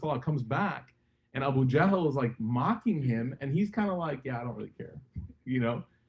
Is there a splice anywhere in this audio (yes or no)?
no